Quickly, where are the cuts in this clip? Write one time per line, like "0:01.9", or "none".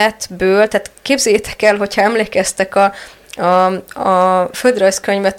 none

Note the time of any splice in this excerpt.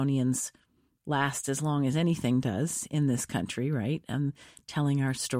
none

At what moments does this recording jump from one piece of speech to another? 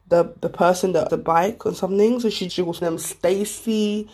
0:01.1
0:02.5
0:02.8

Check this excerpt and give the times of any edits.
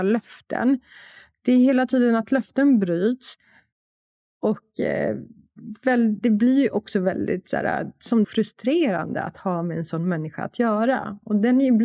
0:08.2

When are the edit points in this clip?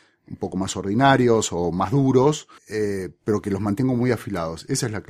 0:02.6

